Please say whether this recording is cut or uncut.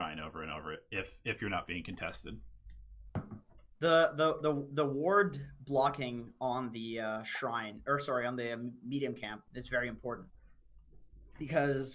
cut